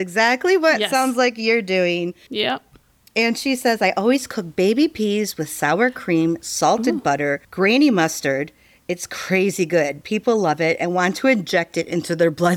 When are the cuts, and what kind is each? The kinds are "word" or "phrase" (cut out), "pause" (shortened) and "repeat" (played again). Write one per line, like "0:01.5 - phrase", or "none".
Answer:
0:07.4 - pause